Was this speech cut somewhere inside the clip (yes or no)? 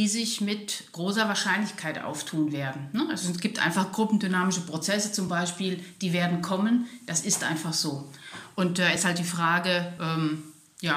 no